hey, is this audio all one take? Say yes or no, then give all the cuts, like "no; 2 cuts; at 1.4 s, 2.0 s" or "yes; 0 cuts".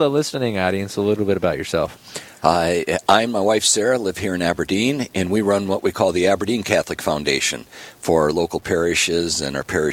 yes; 0 cuts